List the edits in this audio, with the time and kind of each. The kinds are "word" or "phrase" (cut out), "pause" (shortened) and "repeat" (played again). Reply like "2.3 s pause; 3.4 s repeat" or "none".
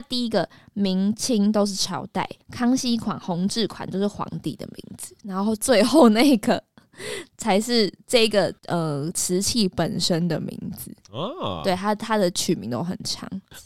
2.4 s pause; 8.6 s pause